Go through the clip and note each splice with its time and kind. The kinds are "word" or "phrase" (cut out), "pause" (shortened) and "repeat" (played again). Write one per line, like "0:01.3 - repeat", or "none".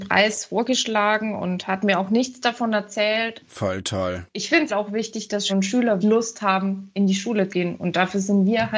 0:04.7 - word
0:05.5 - word
0:06.0 - word
0:07.5 - word